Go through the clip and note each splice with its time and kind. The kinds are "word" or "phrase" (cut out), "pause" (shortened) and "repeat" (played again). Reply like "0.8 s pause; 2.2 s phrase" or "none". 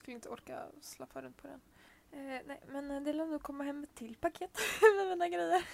none